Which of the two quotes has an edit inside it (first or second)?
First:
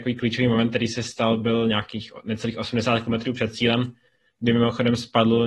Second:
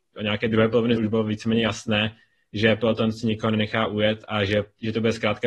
second